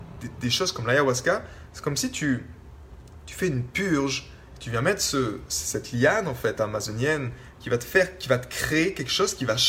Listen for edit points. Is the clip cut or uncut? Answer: uncut